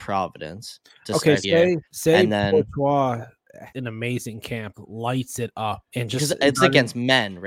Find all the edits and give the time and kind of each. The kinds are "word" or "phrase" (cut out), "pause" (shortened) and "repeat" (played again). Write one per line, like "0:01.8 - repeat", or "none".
0:01.4 - word
0:01.9 - pause
0:03.7 - word
0:04.7 - word
0:05.9 - pause
0:06.5 - word

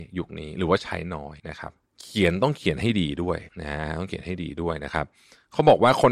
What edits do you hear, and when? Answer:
0:01.4 - pause
0:03.5 - pause

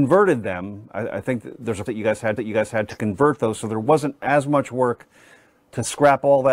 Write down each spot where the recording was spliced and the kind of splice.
0:01.9 - word
0:02.4 - repeat

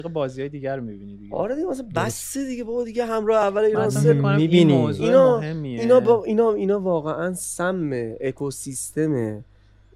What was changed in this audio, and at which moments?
none

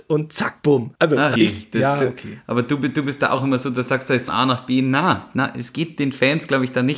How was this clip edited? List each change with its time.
0:01.0 - pause
0:01.4 - word
0:04.3 - phrase

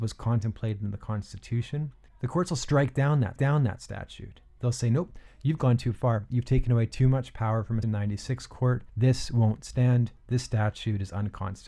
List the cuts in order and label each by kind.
0:02.1 - pause
0:03.4 - repeat
0:07.8 - word
0:08.9 - pause
0:10.2 - pause

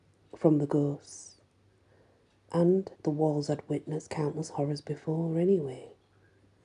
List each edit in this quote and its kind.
0:02.9 - pause

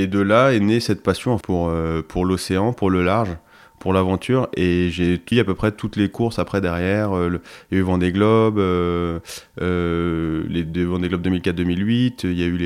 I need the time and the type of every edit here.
0:01.4 - word
0:05.3 - word

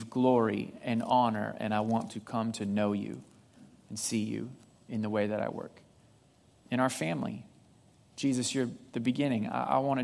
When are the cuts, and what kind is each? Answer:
0:02.1 - word

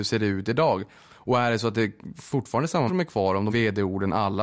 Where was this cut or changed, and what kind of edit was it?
0:02.9 - word
0:03.5 - word

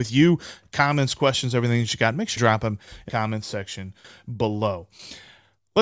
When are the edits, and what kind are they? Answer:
0:02.4 - word
0:03.1 - word

